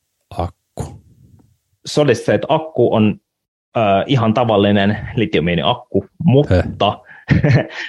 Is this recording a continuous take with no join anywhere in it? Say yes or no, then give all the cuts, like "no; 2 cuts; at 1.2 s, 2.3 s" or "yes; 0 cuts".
yes; 0 cuts